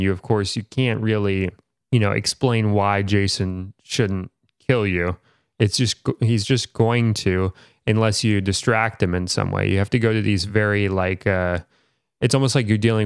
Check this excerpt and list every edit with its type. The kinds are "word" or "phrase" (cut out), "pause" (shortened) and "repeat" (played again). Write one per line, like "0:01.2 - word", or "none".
none